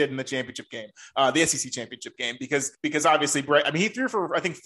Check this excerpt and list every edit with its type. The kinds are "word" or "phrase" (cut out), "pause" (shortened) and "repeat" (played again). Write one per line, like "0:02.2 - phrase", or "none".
0:02.7 - pause